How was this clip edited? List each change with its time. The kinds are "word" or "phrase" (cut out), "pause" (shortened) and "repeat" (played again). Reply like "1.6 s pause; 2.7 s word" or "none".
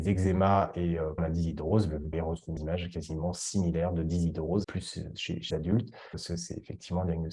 1.2 s word; 2.1 s word; 2.6 s word; 4.6 s word; 5.5 s word; 6.1 s word